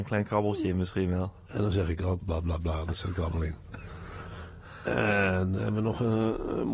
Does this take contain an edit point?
yes; 1 cut; at 2.2 s

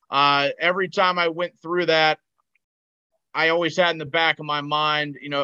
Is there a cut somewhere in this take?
no; 0 cuts

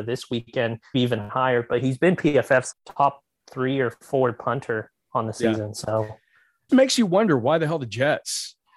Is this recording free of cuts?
no; 3 cuts; at 0.9 s, 2.7 s, 6.7 s

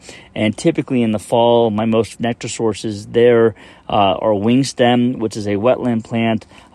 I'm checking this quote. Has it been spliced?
yes; 1 cut; at 2.2 s

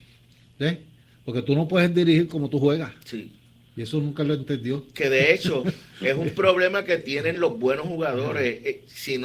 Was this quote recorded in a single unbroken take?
yes; 0 cuts

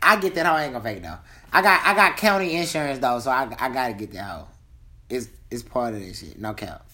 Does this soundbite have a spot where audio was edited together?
no; 0 cuts

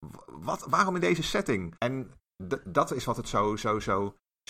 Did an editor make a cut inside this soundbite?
yes; 1 cut; at 1.8 s

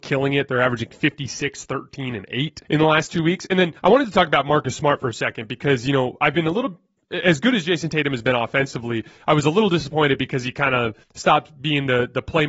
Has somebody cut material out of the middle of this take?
yes; 3 cuts; at 2.6 s, 3.8 s, 11.0 s

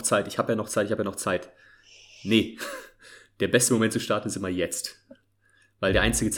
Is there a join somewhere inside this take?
no; 0 cuts

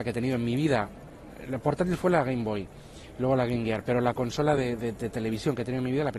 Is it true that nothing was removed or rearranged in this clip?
yes; 0 cuts

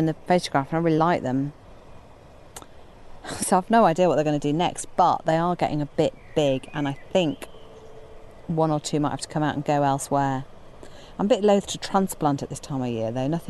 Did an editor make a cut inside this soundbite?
no; 0 cuts

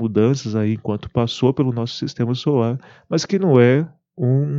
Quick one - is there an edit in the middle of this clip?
no; 0 cuts

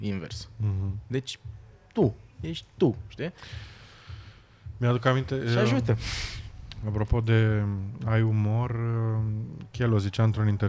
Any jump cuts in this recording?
yes; 1 cut; at 2.3 s

